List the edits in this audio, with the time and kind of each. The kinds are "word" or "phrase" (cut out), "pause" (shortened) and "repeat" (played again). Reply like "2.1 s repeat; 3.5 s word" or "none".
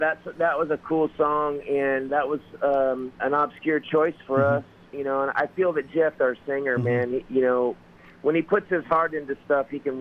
2.1 s word; 3.2 s word; 5.3 s word; 6.2 s word